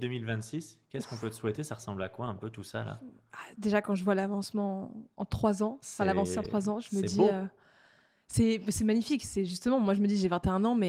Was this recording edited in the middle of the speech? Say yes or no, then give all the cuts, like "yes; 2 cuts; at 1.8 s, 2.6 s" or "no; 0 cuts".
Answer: no; 0 cuts